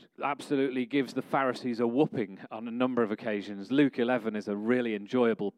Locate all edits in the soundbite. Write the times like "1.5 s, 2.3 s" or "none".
none